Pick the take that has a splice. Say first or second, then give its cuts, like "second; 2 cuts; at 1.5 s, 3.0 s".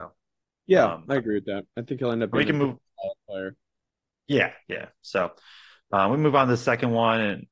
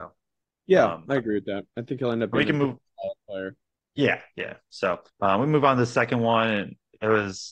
second; 2 cuts; at 3.7 s, 5.1 s